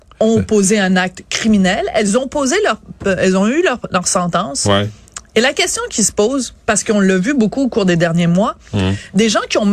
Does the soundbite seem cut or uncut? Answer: cut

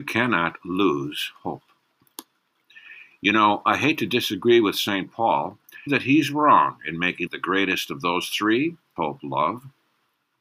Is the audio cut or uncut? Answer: cut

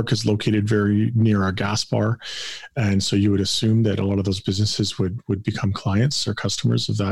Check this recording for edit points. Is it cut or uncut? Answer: uncut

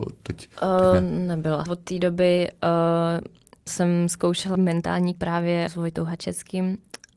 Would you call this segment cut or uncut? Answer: cut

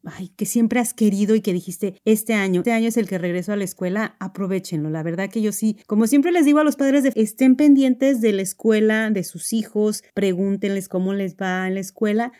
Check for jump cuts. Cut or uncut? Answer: cut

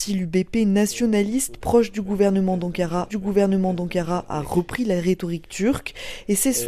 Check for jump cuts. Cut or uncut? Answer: cut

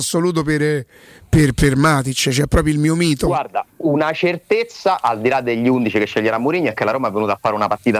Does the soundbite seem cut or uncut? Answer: uncut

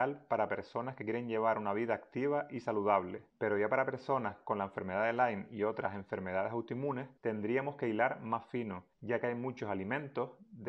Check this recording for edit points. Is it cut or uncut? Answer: cut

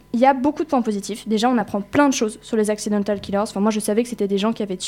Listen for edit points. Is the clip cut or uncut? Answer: uncut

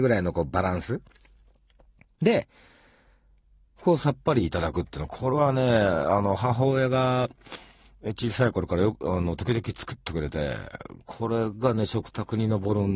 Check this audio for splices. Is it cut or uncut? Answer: uncut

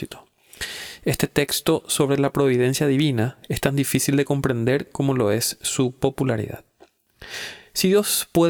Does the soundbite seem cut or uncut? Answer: uncut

